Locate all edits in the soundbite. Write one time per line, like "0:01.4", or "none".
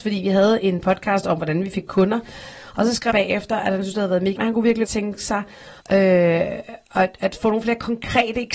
0:03.1
0:04.4
0:04.8
0:05.8